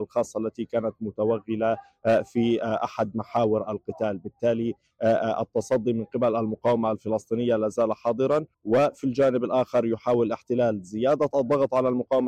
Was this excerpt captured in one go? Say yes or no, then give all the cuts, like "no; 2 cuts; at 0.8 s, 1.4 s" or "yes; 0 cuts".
no; 1 cut; at 8.5 s